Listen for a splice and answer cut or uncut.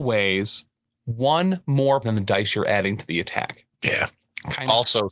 cut